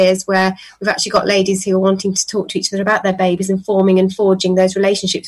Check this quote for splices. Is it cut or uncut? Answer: uncut